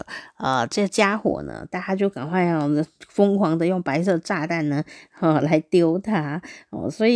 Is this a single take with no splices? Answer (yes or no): yes